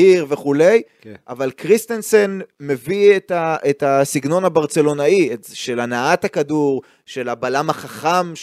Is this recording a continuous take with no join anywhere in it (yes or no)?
yes